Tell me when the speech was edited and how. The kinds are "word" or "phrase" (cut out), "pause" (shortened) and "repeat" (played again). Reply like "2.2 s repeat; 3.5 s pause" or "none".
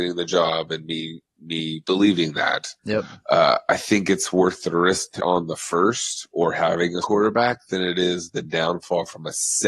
2.8 s pause; 5.2 s word; 7.0 s word

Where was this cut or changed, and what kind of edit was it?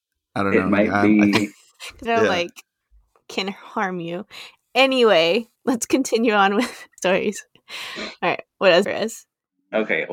2.1 s phrase; 5.6 s pause; 7.0 s word; 8.8 s phrase

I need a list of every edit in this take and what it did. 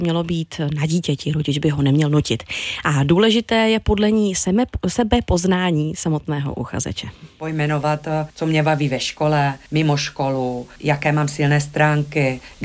none

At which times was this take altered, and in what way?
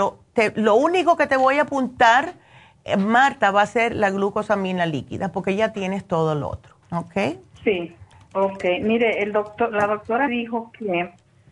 6.8 s pause; 8.1 s pause; 10.3 s word

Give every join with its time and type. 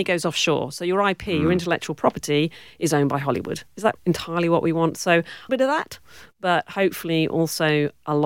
4.0 s word; 5.5 s phrase

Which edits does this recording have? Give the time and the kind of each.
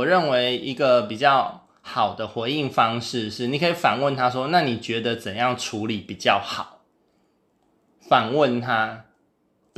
none

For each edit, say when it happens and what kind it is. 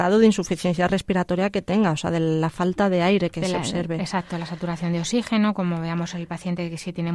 none

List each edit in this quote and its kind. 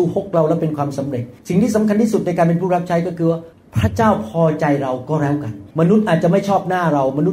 1.4 s pause; 3.5 s pause; 5.7 s pause

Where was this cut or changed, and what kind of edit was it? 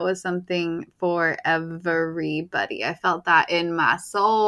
none

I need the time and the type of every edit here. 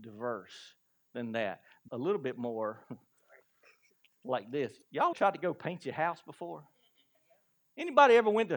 1.9 s phrase; 2.8 s pause; 5.1 s word

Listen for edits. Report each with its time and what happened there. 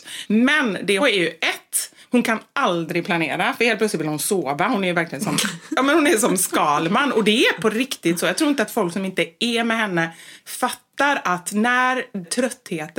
1.0 s phrase

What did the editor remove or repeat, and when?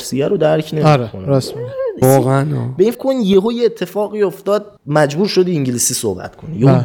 2.0 s word; 2.9 s word; 4.8 s pause

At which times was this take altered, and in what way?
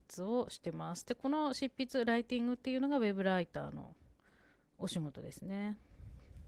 none

